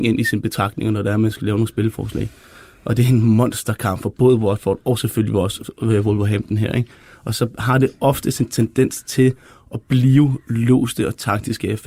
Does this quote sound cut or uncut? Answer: uncut